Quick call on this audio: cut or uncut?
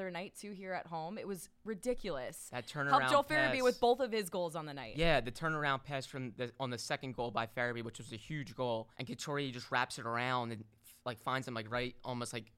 cut